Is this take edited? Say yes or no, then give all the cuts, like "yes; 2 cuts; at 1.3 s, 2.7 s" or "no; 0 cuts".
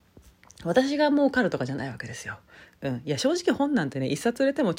no; 0 cuts